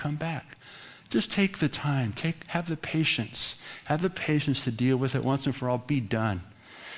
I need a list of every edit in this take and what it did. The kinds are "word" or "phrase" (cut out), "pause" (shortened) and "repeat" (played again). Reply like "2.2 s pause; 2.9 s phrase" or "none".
none